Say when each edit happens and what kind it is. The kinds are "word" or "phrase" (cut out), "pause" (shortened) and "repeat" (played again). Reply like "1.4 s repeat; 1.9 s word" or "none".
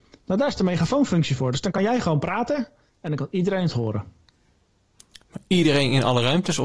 none